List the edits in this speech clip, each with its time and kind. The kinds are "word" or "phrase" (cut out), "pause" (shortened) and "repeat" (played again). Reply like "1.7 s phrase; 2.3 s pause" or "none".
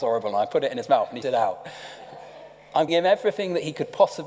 1.2 s word; 2.9 s word